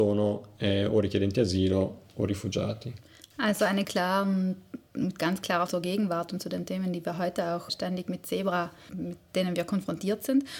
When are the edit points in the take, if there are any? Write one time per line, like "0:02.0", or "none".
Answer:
0:03.8
0:05.7
0:07.7
0:08.9

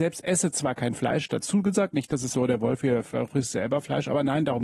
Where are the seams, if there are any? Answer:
0:02.3

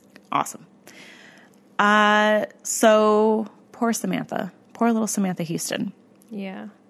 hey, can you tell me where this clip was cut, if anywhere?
none

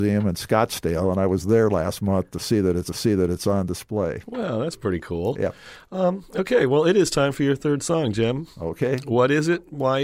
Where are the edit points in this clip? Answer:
0:02.9

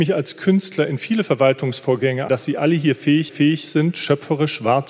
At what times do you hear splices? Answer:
0:02.3
0:03.3

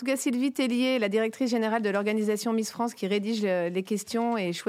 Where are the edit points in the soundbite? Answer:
none

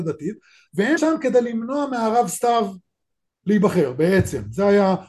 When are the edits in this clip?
0:01.0

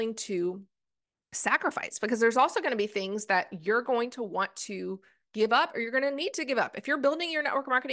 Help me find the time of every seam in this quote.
none

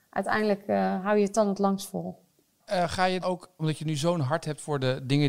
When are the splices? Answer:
0:03.2
0:03.6

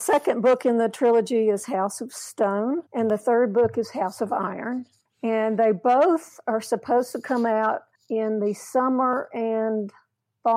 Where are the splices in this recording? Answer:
0:02.9
0:05.1
0:07.9

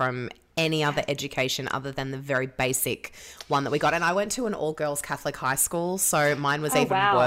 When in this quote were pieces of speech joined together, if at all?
none

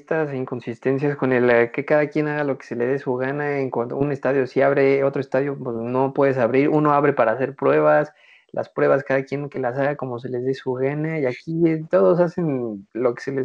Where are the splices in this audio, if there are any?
none

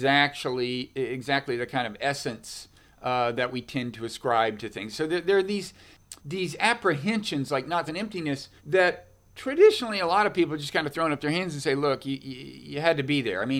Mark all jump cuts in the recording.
0:06.2
0:07.9
0:08.6

